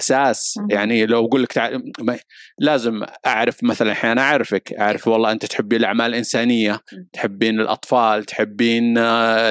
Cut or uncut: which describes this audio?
uncut